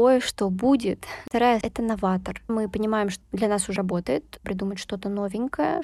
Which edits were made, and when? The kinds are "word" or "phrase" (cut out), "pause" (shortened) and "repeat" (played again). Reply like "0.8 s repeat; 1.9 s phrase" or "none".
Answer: 1.6 s word; 2.5 s word; 3.2 s word; 3.8 s word; 4.4 s word